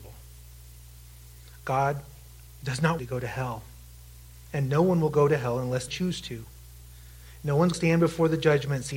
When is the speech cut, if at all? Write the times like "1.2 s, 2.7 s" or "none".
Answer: 3.0 s, 5.9 s, 7.7 s